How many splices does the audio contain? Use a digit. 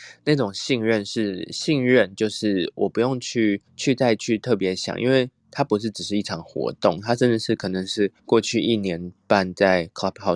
2